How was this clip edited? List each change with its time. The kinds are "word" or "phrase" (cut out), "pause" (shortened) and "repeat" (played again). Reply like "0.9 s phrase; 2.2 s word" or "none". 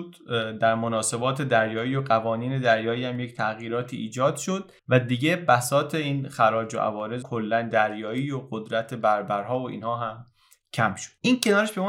4.8 s pause; 7.2 s word; 7.7 s phrase